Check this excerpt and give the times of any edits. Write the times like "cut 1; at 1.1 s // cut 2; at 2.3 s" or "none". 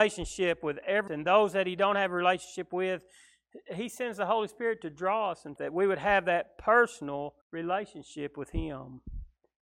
cut 1; at 1.1 s // cut 2; at 5.6 s // cut 3; at 7.4 s